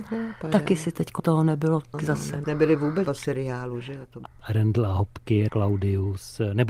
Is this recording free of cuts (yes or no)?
no